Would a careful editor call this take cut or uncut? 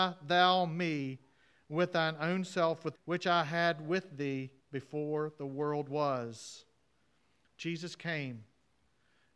cut